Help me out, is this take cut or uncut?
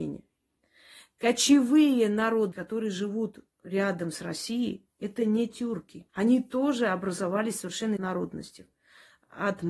cut